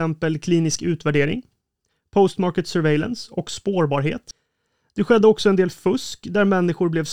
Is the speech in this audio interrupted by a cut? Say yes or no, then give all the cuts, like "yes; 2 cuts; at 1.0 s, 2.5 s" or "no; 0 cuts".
no; 0 cuts